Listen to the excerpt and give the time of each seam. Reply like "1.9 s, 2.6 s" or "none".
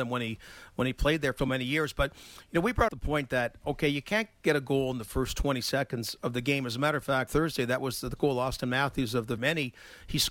1.4 s, 2.9 s, 7.3 s, 8.2 s, 9.4 s